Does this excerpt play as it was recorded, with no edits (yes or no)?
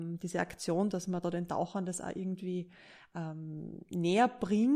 yes